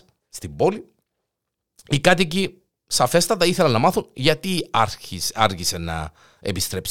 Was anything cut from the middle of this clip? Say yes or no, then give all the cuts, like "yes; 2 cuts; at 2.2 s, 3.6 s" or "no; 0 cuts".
no; 0 cuts